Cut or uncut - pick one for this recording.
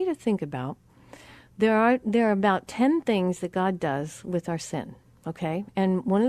uncut